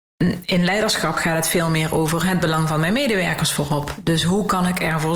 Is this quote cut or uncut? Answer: uncut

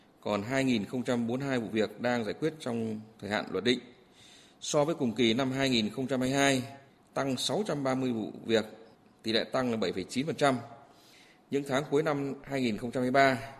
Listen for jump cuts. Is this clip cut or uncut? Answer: uncut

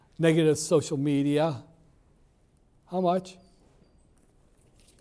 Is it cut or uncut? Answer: uncut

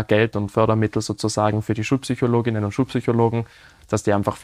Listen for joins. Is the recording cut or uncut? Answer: uncut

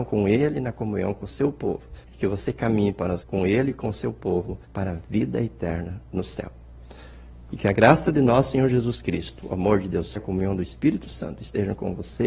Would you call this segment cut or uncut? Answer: cut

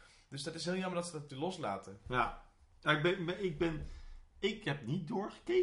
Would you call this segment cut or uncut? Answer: uncut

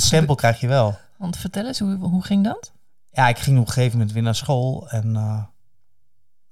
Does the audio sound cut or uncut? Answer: uncut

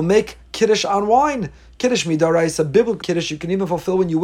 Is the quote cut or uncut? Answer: cut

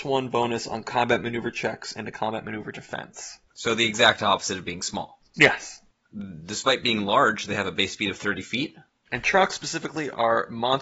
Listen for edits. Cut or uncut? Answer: uncut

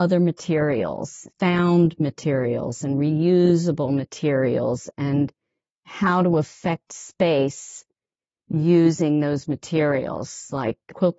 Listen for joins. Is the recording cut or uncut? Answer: uncut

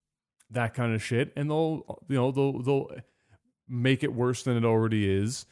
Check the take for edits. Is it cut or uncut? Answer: uncut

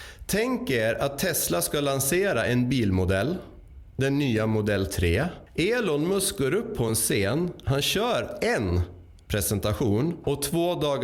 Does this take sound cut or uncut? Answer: uncut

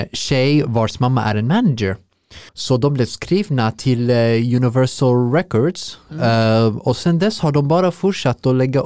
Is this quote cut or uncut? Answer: cut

